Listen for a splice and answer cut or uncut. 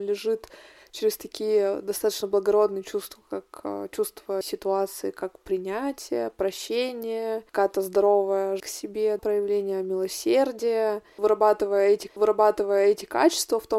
cut